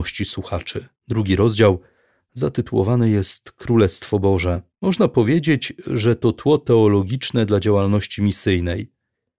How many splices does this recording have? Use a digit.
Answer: 2